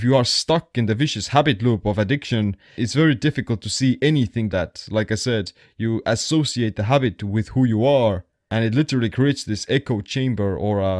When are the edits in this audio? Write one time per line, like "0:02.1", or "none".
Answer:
0:02.8
0:04.5